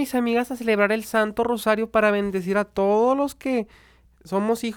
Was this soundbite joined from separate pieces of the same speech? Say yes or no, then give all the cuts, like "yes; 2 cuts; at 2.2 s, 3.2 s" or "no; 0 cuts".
no; 0 cuts